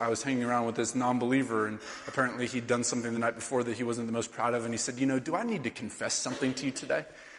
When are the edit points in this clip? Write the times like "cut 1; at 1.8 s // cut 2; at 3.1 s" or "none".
none